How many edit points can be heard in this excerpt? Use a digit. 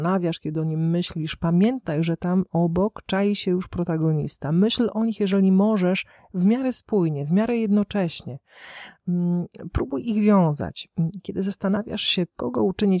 0